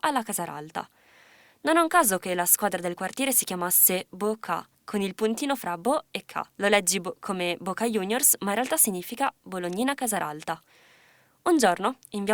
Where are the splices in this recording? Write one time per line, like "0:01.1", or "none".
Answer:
0:04.7
0:06.5